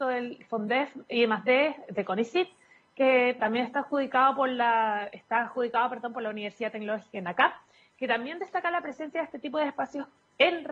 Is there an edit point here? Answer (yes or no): no